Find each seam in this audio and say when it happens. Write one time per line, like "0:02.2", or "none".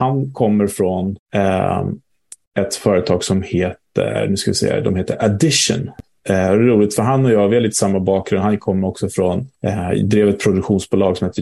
0:01.2
0:09.6